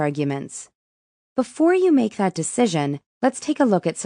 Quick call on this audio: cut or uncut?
cut